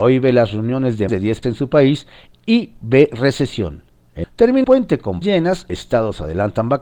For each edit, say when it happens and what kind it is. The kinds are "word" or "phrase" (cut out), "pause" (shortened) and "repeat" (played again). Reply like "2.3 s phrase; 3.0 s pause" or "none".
1.1 s word; 1.4 s word; 4.2 s word; 4.6 s word; 5.2 s word; 5.7 s word